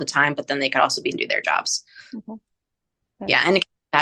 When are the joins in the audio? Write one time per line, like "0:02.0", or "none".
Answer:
0:01.1

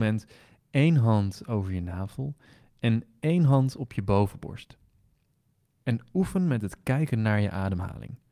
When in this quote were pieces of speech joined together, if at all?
none

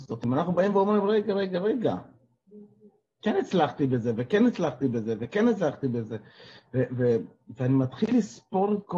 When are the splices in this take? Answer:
none

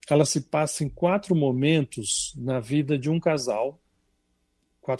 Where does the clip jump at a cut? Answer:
none

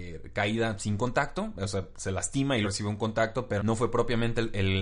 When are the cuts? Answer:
0:02.6
0:03.6

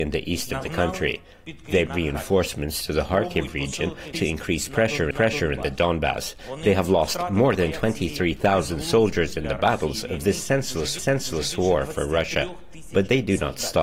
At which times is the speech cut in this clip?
0:01.9
0:04.1
0:05.1
0:11.0

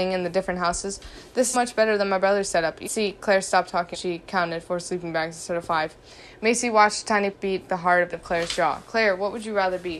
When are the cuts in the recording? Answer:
0:01.5
0:02.8
0:03.9
0:07.3
0:07.7
0:08.1

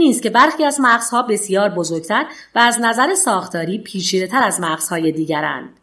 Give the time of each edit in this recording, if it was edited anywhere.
none

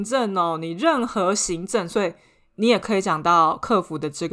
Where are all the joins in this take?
none

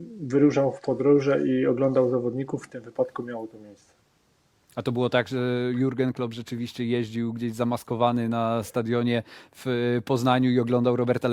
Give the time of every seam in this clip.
none

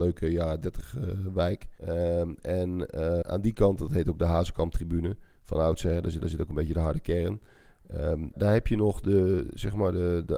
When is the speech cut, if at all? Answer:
0:01.8
0:03.2
0:06.2
0:08.3

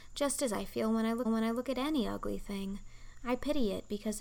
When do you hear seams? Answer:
0:01.2

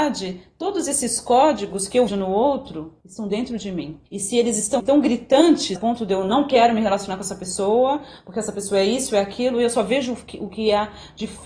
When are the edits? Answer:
0:02.1
0:03.0
0:04.1
0:04.8
0:05.8

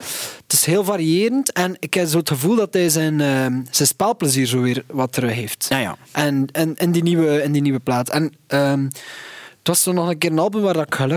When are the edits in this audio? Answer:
none

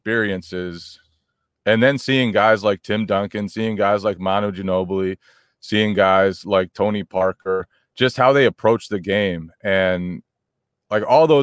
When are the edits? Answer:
none

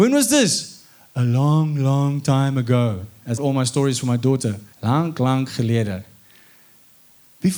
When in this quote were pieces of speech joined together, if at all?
0:03.4
0:04.7

